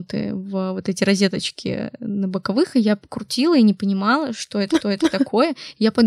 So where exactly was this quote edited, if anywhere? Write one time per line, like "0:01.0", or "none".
0:04.8